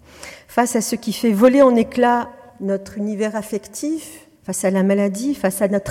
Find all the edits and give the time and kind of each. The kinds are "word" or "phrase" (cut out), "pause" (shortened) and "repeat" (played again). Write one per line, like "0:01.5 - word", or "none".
0:02.5 - pause
0:04.4 - pause